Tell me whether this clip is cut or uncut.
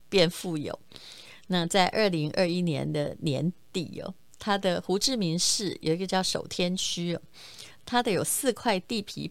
uncut